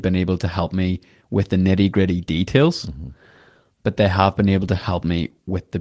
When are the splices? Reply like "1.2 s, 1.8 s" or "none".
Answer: none